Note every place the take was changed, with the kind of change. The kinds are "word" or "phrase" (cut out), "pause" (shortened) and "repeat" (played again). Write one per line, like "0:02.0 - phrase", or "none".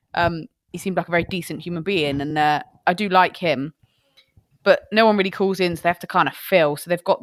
none

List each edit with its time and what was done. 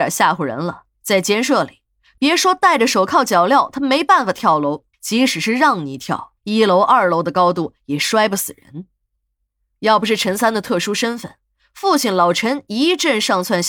0:00.9 - pause
0:04.9 - pause
0:06.4 - pause

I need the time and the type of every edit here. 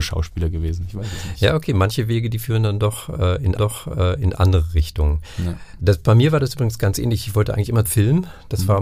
0:03.6 - repeat
0:07.8 - word

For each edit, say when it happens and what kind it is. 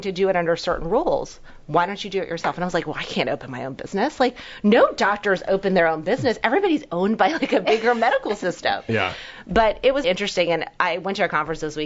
0:10.0 - word

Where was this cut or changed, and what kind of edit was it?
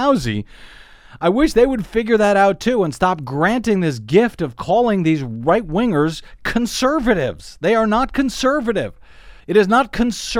0:09.4 - pause

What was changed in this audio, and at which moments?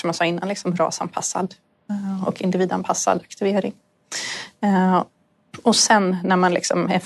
none

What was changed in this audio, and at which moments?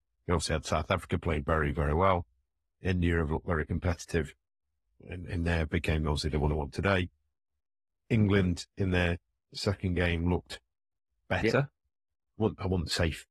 0:05.7 - phrase

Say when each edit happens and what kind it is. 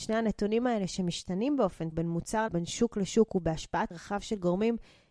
0:01.9 - word
0:02.5 - word
0:03.9 - word

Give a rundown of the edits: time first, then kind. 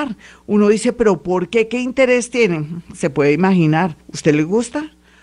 0:04.0 - pause

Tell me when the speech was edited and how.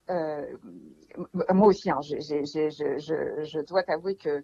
none

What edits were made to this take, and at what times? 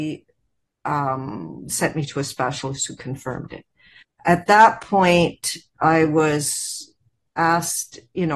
0:04.0 - pause

